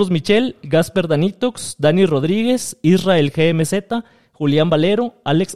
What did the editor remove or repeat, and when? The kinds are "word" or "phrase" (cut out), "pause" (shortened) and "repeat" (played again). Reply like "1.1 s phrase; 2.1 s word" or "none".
none